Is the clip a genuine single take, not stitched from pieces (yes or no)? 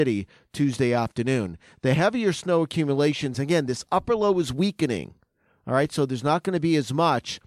yes